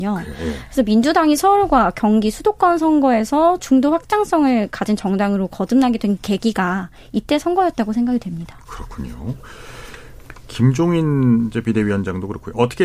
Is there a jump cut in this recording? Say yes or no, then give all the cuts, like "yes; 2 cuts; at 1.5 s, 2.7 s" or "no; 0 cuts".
no; 0 cuts